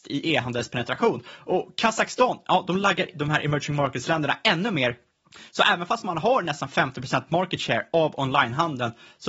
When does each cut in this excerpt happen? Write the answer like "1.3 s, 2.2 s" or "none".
3.1 s